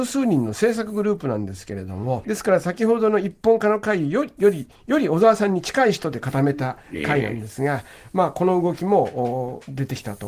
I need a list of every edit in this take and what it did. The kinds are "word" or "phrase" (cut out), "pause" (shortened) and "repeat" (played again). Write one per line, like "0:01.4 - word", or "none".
0:02.2 - phrase